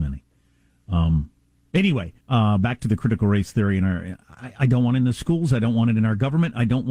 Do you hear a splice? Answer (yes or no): yes